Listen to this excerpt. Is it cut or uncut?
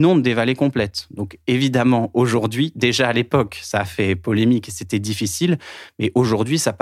uncut